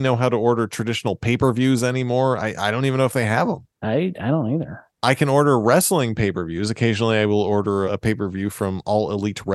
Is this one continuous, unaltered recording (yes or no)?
no